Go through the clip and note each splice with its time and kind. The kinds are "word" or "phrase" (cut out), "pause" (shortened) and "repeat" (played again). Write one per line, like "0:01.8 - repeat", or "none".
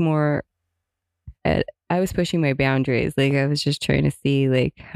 0:01.3 - pause

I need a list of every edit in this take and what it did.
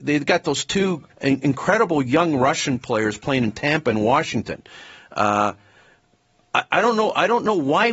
0:01.1 - pause

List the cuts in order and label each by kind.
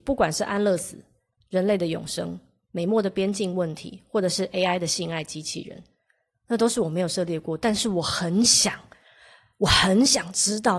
none

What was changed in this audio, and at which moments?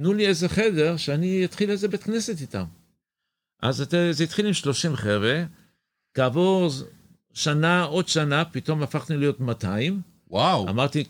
none

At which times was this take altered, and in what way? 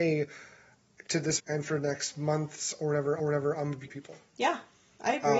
0:01.4 - word
0:03.2 - repeat
0:03.9 - word

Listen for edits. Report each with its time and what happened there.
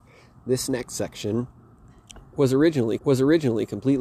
0:03.0 - repeat

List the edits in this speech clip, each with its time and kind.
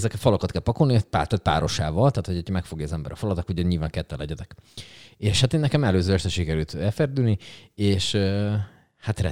none

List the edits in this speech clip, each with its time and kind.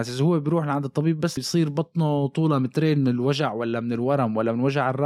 0:01.4 - word

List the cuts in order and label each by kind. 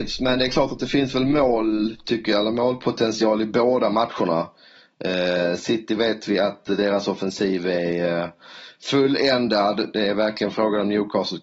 none

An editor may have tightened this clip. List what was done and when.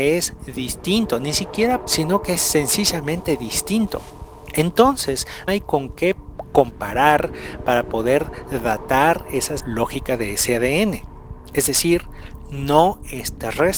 0:01.8 - word
0:05.5 - word
0:09.6 - word

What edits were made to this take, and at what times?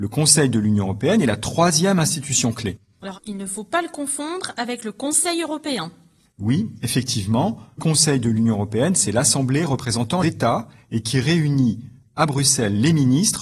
0:03.1 - word
0:07.8 - word
0:10.2 - word

